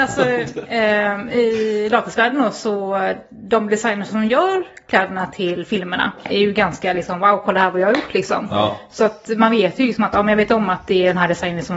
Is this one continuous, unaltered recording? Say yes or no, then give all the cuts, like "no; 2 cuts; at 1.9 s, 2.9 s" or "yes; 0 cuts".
no; 1 cut; at 6.3 s